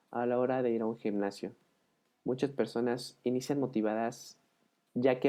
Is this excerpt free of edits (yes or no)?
yes